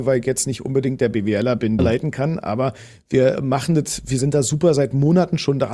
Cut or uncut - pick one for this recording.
cut